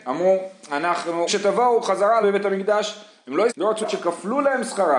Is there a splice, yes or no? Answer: yes